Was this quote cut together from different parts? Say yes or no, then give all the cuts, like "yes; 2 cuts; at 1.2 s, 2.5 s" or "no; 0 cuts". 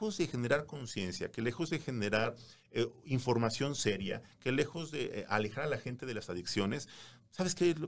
no; 0 cuts